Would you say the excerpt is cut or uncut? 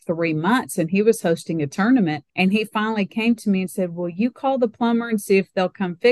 cut